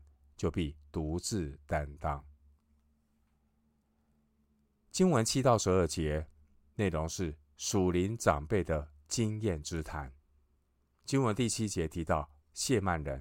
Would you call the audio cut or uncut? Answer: cut